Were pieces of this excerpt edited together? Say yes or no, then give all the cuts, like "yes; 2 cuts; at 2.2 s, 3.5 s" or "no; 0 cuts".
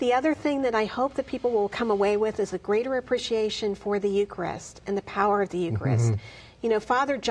no; 0 cuts